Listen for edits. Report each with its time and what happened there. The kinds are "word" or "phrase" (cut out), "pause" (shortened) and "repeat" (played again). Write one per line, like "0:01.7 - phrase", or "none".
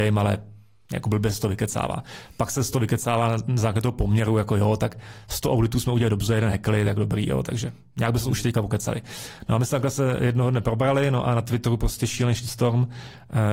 none